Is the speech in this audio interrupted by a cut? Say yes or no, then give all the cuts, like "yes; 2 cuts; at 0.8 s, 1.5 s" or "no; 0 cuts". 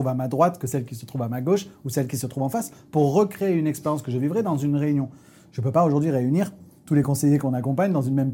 no; 0 cuts